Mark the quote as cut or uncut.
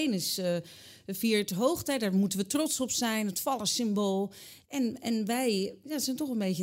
uncut